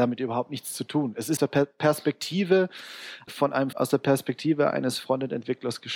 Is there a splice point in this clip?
yes; 3 cuts; at 1.4 s, 3.3 s, 3.7 s

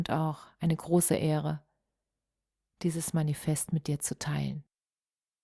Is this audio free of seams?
yes; 0 cuts

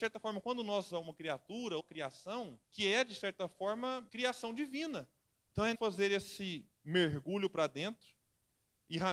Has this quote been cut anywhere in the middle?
yes; 7 cuts; at 0.9 s, 1.8 s, 2.6 s, 4.1 s, 5.4 s, 5.7 s, 6.7 s

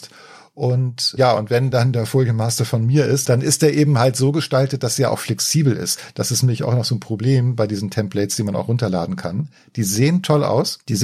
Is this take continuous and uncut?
yes; 0 cuts

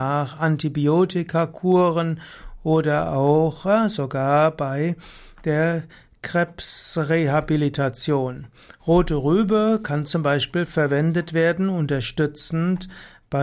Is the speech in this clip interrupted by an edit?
no; 0 cuts

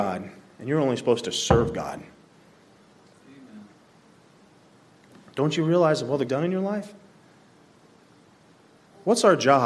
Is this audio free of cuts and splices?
no; 1 cut; at 6.3 s

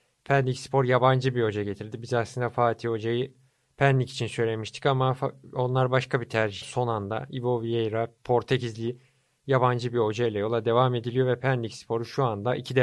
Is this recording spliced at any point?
yes; 1 cut; at 6.6 s

